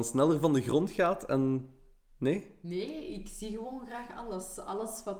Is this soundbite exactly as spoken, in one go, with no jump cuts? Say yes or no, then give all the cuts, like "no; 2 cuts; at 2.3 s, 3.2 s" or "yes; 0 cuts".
yes; 0 cuts